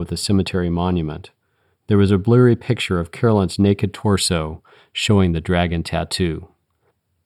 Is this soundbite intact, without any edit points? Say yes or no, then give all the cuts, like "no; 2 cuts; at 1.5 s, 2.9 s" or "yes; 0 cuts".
yes; 0 cuts